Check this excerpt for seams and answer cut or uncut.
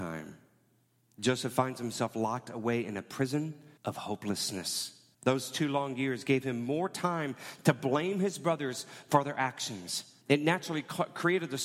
cut